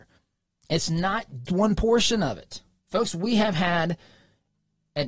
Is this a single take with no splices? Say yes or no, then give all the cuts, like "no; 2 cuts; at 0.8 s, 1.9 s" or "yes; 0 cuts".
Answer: no; 1 cut; at 1.5 s